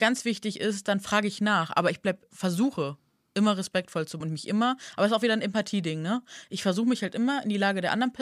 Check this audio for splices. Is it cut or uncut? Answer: cut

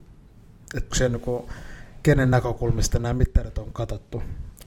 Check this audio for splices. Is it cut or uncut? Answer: cut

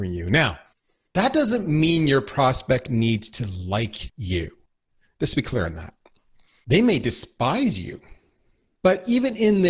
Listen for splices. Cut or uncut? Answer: uncut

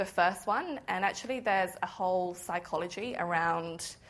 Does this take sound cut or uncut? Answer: uncut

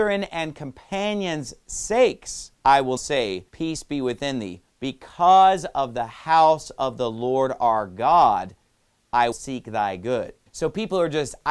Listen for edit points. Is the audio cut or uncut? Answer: cut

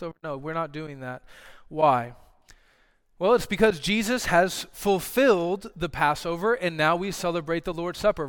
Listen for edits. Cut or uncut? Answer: uncut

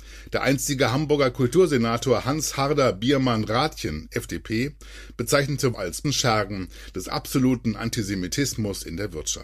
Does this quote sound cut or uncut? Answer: cut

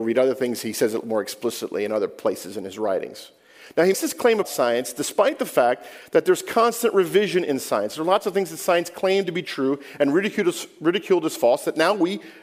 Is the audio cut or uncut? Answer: cut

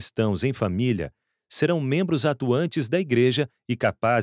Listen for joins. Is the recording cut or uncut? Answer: uncut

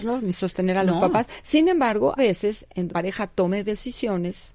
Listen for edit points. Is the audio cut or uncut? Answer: cut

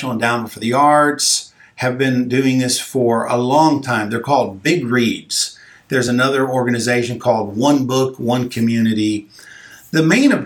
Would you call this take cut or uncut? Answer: uncut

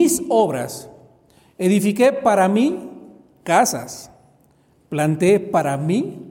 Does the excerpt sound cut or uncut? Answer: uncut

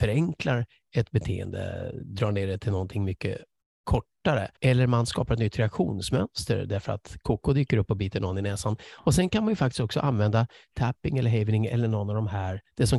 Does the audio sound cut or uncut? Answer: cut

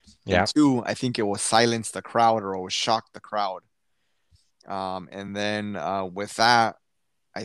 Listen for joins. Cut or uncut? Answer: uncut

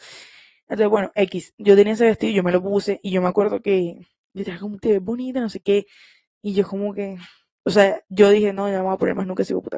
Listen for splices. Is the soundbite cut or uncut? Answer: cut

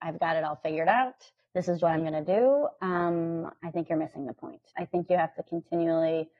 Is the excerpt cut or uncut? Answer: cut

